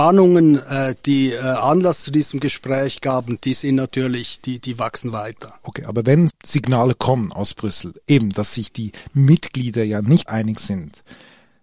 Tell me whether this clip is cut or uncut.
cut